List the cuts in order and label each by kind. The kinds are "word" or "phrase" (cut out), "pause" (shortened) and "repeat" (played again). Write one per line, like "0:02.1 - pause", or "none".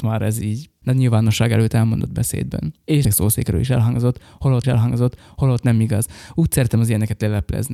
0:03.0 - phrase
0:04.6 - repeat

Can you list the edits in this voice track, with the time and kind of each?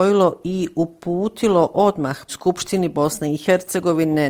0:02.3 - word

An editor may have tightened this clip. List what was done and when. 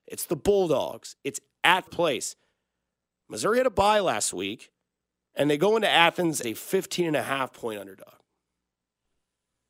0:01.9 - word
0:06.4 - word

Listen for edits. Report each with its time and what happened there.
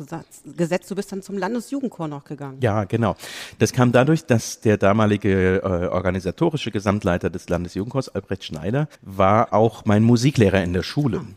0:09.0 - pause

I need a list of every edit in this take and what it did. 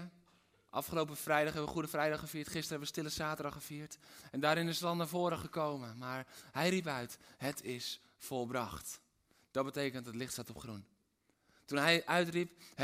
none

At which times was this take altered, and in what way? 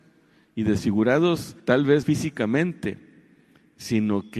0:01.6 - pause
0:02.0 - word

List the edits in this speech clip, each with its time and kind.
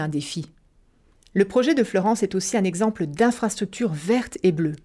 none

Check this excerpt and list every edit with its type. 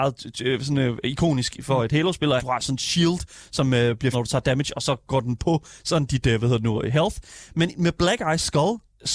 0:02.4 - word
0:04.1 - word

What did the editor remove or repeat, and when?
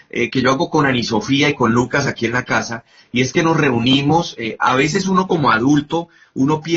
none

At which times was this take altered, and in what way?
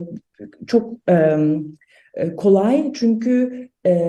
none

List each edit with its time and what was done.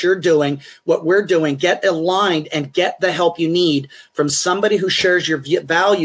none

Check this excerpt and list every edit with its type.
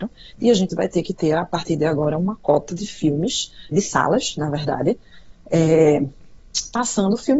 0:03.7 - word

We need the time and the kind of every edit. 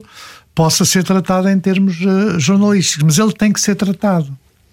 none

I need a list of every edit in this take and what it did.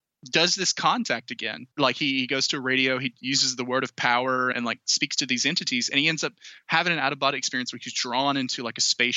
0:01.7 - pause
0:04.5 - word

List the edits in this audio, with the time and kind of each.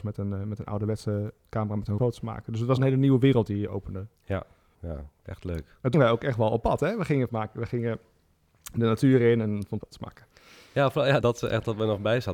0:02.0 - word
0:02.8 - word
0:05.9 - word
0:07.3 - word
0:09.8 - word
0:11.2 - word

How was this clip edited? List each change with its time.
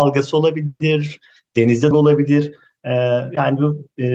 0:01.9 - word

